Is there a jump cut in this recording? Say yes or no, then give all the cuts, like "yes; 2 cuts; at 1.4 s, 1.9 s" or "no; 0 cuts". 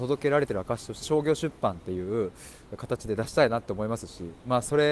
yes; 1 cut; at 1.0 s